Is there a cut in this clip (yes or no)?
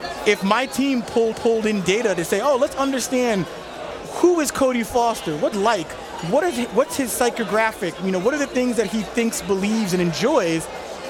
yes